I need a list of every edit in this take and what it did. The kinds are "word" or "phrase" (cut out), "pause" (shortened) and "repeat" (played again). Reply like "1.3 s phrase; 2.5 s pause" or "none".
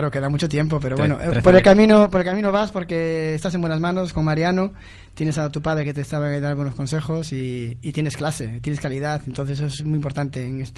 none